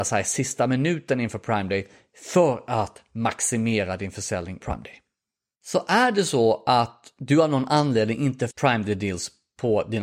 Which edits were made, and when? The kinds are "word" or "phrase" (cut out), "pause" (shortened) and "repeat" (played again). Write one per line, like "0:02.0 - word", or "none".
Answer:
0:04.6 - word
0:08.5 - word